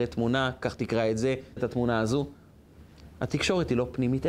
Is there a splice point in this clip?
yes; 1 cut; at 1.6 s

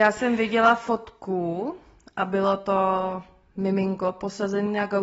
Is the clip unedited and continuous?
yes; 0 cuts

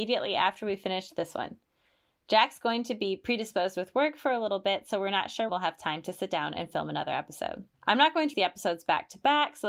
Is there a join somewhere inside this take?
yes; 3 cuts; at 5.5 s, 7.7 s, 8.3 s

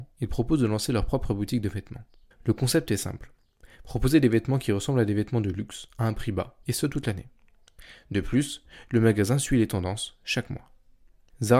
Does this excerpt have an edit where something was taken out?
yes; 2 cuts; at 2.3 s, 6.6 s

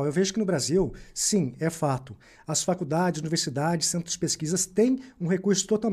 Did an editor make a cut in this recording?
no; 0 cuts

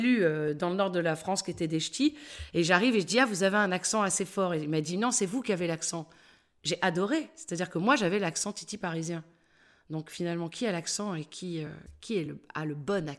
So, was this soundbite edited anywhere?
no; 0 cuts

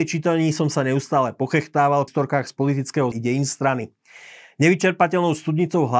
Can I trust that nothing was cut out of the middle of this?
no; 2 cuts; at 2.1 s, 3.1 s

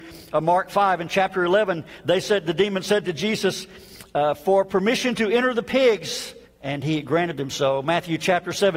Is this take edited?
yes; 1 cut; at 6.4 s

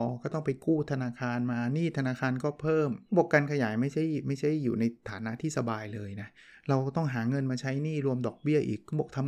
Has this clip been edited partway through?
yes; 1 cut; at 3.1 s

